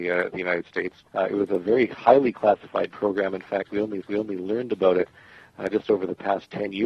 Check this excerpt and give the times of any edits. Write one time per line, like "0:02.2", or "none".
0:01.1
0:04.0